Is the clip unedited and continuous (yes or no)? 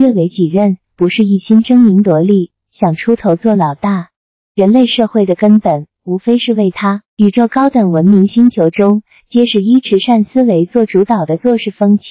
no